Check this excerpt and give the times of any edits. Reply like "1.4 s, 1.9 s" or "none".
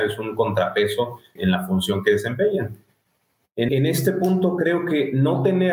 1.4 s, 3.7 s